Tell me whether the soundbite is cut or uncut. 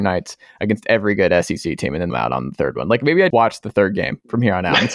cut